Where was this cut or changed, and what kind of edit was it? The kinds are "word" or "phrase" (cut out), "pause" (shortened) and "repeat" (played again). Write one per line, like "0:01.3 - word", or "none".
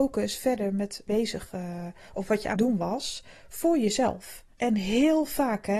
0:01.1 - phrase
0:02.5 - word
0:04.5 - pause